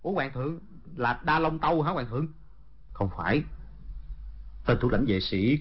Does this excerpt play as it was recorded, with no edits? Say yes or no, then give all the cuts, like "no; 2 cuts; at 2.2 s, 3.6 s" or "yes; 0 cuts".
yes; 0 cuts